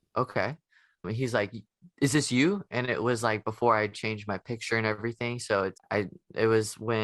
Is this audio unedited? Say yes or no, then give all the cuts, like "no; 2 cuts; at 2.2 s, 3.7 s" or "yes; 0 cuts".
no; 2 cuts; at 1.0 s, 5.8 s